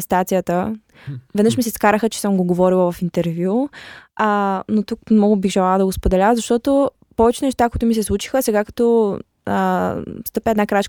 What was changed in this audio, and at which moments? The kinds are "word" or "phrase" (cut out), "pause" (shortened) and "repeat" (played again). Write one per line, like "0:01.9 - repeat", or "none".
none